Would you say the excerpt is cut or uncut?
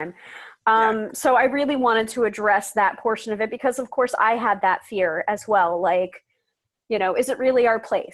uncut